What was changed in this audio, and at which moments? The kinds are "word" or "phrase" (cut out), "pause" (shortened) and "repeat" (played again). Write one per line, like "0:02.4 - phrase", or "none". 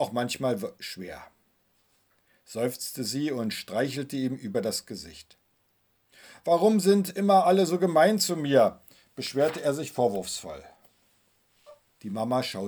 none

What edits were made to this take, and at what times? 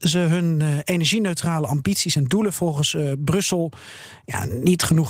none

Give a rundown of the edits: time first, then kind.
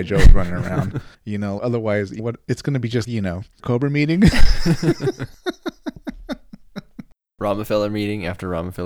0:01.1 - pause
0:01.6 - word
0:02.2 - word
0:03.0 - word
0:03.6 - phrase

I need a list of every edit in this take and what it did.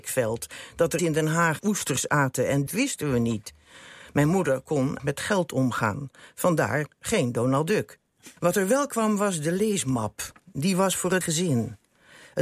0:01.0 - word
0:01.6 - word
0:02.7 - phrase
0:05.0 - word
0:08.4 - pause
0:11.2 - word

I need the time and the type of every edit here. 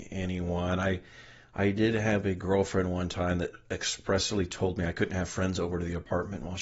none

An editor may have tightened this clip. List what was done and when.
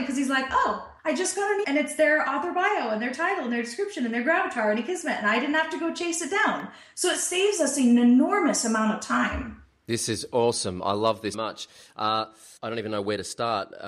0:01.0 - pause
0:01.6 - word
0:11.3 - word
0:12.6 - pause

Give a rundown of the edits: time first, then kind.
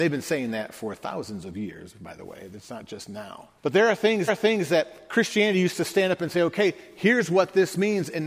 0:03.6 - pause
0:04.3 - repeat

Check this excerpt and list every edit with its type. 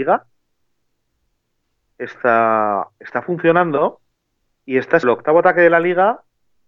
0:04.2 - pause
0:05.0 - word

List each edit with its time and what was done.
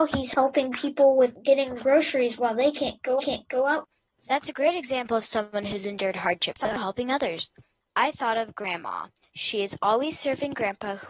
0:03.2 - repeat

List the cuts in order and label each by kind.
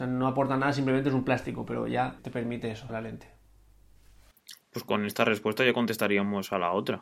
0:02.2 - word
0:02.9 - word

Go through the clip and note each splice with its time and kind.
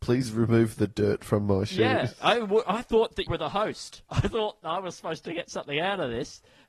0:03.3 - word

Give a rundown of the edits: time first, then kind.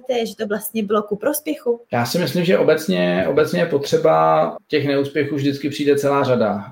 0:01.8 - pause

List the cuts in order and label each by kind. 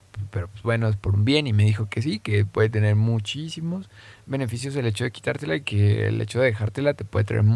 none

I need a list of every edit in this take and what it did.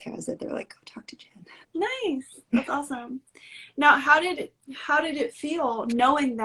0:01.6 - pause

